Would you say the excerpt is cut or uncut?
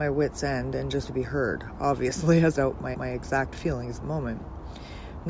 cut